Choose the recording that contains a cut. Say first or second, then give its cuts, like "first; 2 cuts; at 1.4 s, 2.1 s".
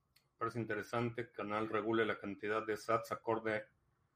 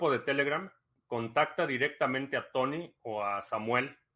first; 1 cut; at 1.3 s